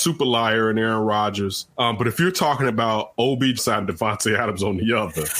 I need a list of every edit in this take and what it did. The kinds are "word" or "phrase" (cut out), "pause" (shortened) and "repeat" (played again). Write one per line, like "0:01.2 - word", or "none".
0:01.7 - pause
0:03.6 - phrase